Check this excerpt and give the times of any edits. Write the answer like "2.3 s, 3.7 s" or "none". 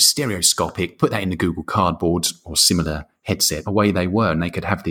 3.6 s